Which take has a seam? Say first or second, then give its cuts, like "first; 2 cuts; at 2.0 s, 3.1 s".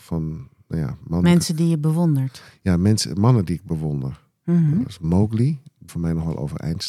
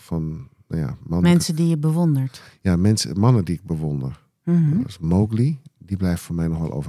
first; 1 cut; at 5.9 s